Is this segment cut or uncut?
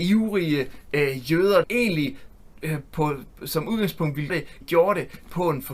cut